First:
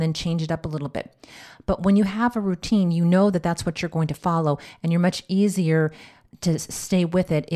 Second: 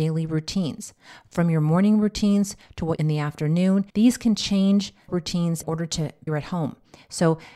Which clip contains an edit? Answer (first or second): second